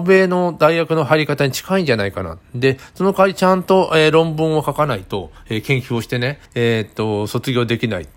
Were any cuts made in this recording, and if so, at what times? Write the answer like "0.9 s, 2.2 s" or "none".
6.5 s